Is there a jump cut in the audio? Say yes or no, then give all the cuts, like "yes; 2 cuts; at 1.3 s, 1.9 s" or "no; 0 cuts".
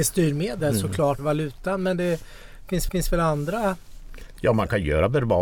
yes; 2 cuts; at 1.2 s, 2.9 s